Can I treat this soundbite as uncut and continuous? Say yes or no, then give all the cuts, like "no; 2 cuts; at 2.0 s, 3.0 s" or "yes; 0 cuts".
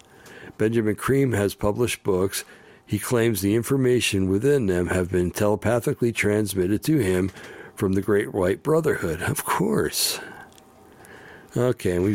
yes; 0 cuts